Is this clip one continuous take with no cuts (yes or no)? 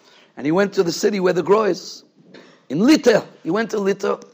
yes